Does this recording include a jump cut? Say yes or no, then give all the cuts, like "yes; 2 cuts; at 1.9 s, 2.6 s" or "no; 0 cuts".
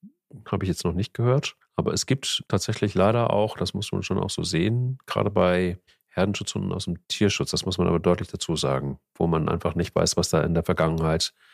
yes; 4 cuts; at 1.6 s, 2.5 s, 5.9 s, 7.0 s